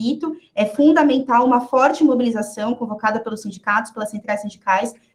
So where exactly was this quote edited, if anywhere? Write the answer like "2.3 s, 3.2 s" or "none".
none